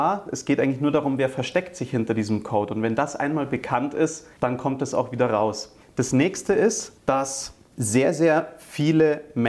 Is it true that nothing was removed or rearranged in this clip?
no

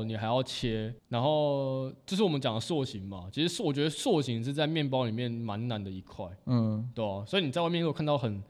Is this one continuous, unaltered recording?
no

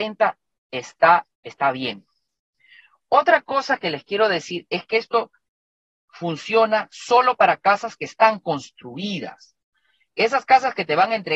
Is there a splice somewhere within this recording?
yes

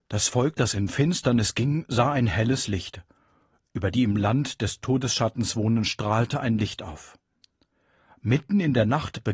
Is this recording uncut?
no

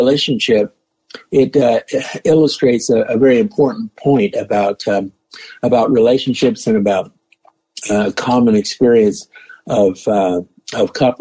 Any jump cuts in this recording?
no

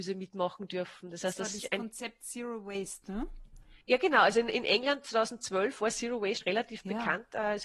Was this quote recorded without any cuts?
no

